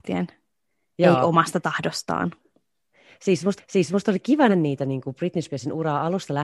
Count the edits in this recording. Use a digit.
2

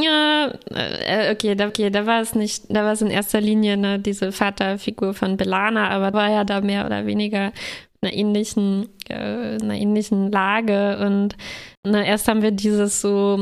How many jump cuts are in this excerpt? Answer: 4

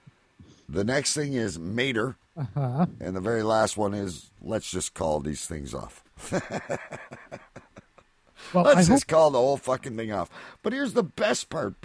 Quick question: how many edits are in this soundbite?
1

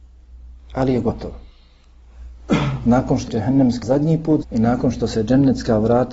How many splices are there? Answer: 3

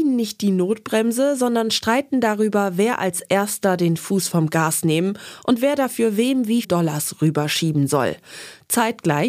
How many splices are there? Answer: 1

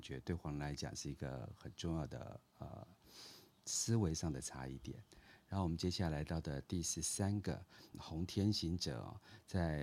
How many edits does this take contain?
1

